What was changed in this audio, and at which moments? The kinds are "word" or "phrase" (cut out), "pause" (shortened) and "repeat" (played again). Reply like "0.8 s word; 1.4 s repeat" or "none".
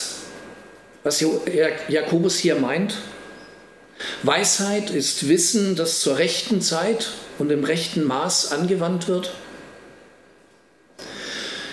none